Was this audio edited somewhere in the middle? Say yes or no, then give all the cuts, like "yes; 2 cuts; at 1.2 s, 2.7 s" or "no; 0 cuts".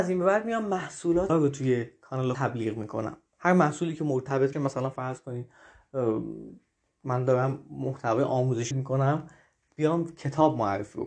yes; 4 cuts; at 1.3 s, 2.3 s, 4.5 s, 8.7 s